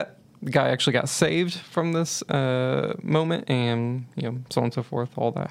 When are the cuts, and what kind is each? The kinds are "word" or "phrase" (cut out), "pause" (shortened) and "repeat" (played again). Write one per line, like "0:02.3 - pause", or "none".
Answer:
none